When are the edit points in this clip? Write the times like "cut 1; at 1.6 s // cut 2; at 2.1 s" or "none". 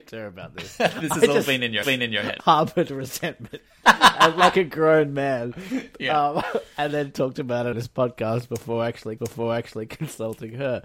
cut 1; at 1.8 s // cut 2; at 2.4 s // cut 3; at 7.7 s // cut 4; at 9.2 s